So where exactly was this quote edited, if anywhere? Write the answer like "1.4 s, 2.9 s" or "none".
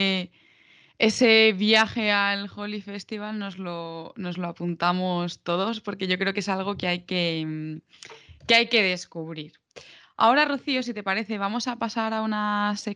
none